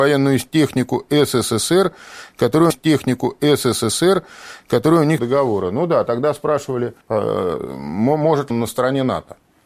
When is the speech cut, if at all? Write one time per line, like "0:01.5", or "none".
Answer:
0:02.7
0:05.2
0:07.0
0:08.5